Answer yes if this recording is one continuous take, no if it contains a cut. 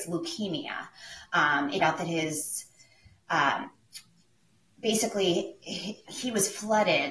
no